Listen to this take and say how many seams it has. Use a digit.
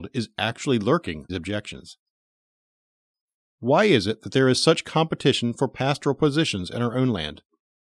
1